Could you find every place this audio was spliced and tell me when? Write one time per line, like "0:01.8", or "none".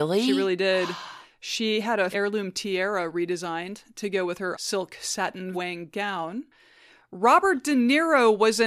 0:02.1
0:04.5
0:05.5